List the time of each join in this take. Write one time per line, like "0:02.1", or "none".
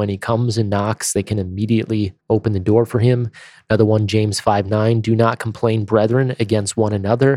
0:02.2